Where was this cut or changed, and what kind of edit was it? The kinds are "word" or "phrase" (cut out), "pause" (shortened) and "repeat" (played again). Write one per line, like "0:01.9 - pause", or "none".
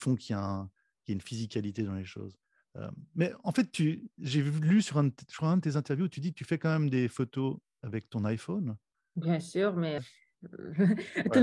0:10.0 - word

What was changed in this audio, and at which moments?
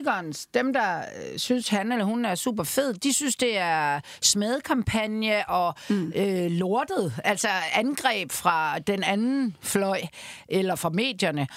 none

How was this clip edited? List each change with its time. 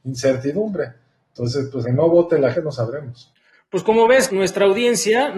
0:01.8 - word
0:02.5 - word
0:04.3 - word

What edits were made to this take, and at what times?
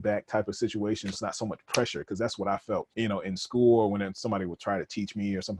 0:01.1 - word
0:02.9 - pause

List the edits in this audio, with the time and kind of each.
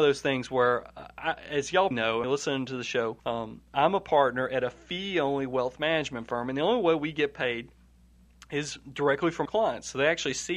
0:01.9 - word
0:02.2 - phrase
0:03.2 - pause
0:09.5 - word

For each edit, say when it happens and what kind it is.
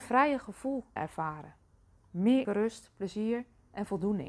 0:01.0 - word
0:02.4 - word

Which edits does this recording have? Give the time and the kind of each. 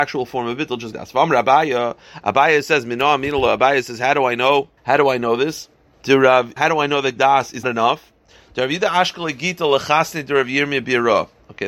0:00.9 - word
0:04.8 - pause
0:05.9 - pause
0:06.6 - word
0:07.2 - word
0:07.6 - word

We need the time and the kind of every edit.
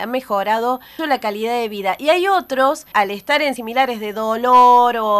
0:01.0 - word
0:02.9 - word
0:03.6 - word

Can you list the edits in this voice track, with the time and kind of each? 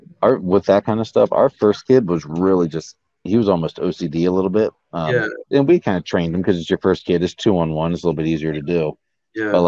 none

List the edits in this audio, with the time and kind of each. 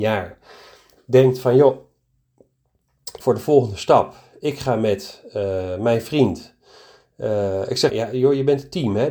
0:03.2 - phrase
0:07.9 - word

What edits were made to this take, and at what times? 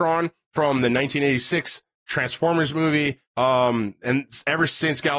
0:03.3 - pause

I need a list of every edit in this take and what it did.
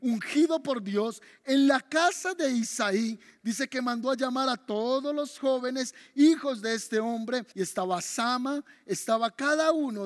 0:07.5 - pause

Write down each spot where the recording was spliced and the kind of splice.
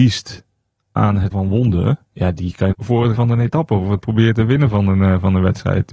0:01.3 - word
0:02.0 - pause
0:02.7 - phrase
0:03.1 - word

